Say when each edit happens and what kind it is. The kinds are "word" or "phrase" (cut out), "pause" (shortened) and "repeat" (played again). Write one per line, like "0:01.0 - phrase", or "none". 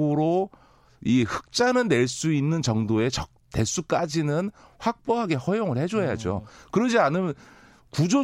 0:03.4 - word